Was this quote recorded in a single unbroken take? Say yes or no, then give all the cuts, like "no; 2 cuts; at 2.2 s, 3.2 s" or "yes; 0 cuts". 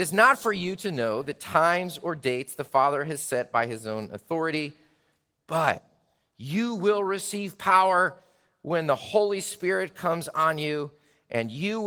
yes; 0 cuts